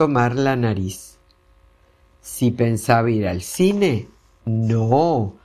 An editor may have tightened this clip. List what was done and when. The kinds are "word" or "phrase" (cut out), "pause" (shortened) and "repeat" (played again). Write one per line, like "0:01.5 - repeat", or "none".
none